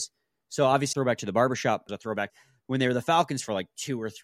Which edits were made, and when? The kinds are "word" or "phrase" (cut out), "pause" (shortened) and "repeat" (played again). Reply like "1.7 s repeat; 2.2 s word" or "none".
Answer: 0.9 s phrase; 1.9 s phrase; 2.3 s phrase